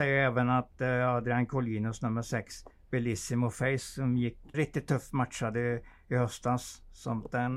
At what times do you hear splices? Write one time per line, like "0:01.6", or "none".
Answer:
0:04.5